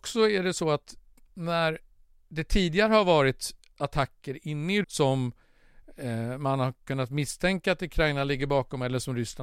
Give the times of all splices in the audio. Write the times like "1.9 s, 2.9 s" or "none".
4.8 s